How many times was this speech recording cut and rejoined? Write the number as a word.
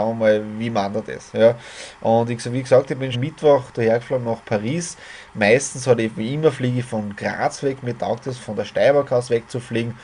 two